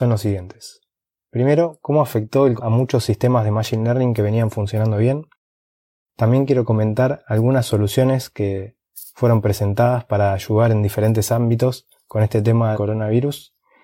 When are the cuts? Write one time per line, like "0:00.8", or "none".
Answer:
0:02.6
0:12.7